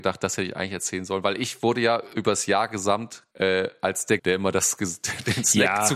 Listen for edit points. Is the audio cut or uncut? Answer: cut